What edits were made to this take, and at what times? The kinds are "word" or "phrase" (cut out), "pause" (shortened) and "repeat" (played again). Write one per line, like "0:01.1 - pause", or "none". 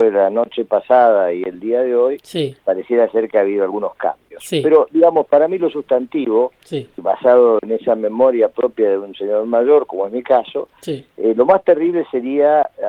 0:02.6 - pause
0:07.0 - word